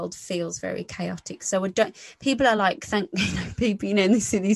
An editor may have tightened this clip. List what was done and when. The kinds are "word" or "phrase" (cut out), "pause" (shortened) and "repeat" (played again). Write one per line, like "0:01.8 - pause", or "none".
none